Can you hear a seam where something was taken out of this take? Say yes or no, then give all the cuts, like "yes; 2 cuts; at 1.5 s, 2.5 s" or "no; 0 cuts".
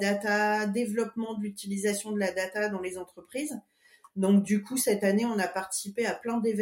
no; 0 cuts